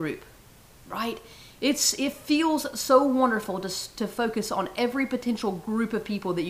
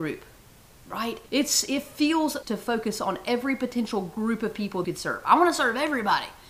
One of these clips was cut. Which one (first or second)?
second